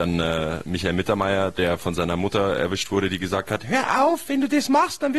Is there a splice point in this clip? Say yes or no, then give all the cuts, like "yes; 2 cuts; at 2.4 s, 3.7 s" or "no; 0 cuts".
no; 0 cuts